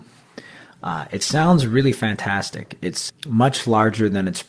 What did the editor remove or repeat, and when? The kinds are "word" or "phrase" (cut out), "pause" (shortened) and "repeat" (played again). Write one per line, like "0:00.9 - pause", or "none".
0:03.1 - word